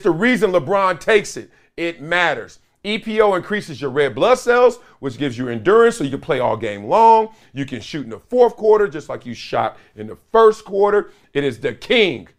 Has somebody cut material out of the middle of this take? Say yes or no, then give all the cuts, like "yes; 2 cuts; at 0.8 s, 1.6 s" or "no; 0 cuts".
no; 0 cuts